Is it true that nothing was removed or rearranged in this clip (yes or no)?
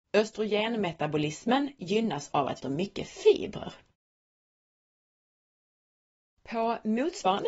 no